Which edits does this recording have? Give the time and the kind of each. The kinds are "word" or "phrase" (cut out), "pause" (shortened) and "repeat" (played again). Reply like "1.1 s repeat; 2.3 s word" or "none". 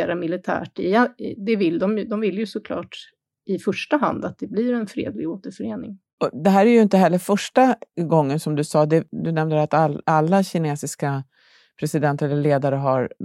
none